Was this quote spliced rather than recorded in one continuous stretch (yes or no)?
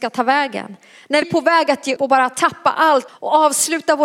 yes